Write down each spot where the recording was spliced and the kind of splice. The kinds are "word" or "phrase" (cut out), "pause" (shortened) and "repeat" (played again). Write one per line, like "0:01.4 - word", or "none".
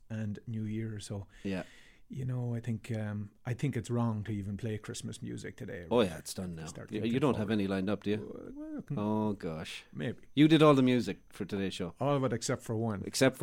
none